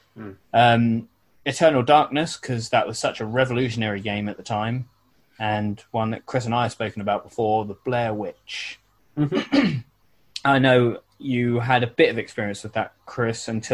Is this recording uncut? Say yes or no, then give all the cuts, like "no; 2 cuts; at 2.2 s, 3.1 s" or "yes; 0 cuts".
yes; 0 cuts